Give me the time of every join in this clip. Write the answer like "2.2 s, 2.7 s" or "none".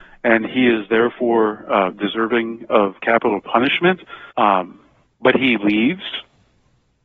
4.3 s